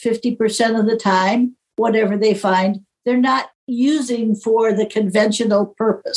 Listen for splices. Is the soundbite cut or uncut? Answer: uncut